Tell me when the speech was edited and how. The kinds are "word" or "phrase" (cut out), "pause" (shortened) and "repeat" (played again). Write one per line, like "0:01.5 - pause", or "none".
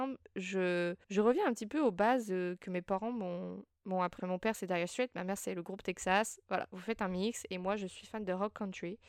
0:01.0 - pause
0:03.7 - pause
0:04.2 - word